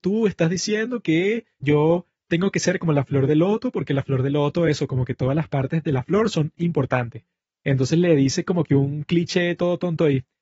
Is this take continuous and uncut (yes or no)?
yes